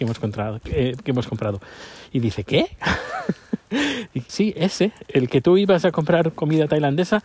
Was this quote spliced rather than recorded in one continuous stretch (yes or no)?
yes